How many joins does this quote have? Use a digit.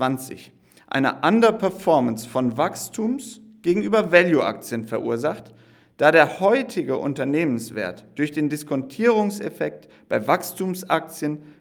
0